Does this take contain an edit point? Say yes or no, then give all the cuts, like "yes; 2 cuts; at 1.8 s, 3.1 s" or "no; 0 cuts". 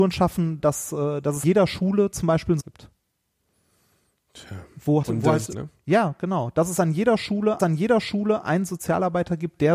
yes; 5 cuts; at 1.4 s, 2.6 s, 5.0 s, 5.5 s, 7.6 s